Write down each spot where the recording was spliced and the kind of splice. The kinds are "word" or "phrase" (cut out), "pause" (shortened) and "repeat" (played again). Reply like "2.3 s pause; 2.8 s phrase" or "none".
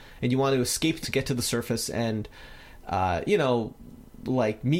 1.0 s phrase

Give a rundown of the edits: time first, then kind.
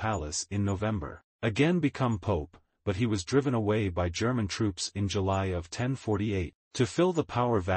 1.3 s pause; 6.6 s pause

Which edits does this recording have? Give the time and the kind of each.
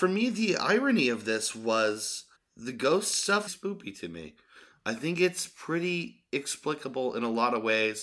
2.3 s pause; 3.5 s phrase

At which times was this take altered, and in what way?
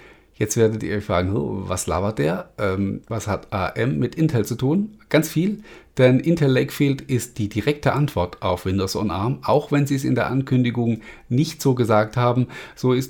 3.0 s pause

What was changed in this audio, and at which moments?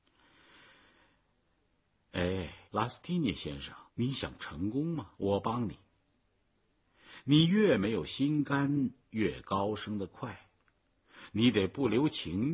2.7 s pause; 3.9 s pause; 5.1 s pause

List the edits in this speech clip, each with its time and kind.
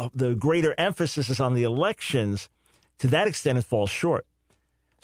none

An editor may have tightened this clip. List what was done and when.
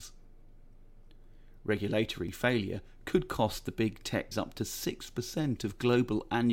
4.3 s word

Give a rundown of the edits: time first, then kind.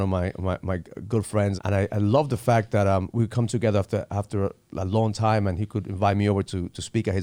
1.6 s word

